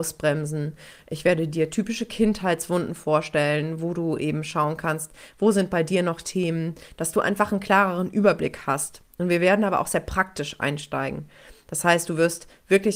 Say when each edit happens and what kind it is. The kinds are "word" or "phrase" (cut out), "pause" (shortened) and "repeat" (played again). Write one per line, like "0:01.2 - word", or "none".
none